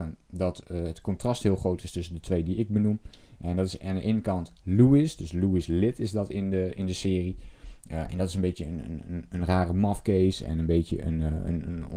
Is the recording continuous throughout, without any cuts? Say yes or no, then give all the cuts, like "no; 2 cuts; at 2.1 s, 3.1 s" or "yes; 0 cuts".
yes; 0 cuts